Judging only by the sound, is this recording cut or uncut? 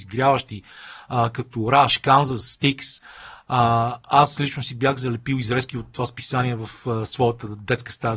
uncut